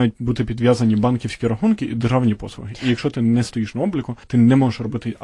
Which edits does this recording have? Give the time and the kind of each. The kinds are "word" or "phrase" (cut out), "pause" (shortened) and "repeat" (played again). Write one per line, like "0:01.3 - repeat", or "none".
0:04.2 - pause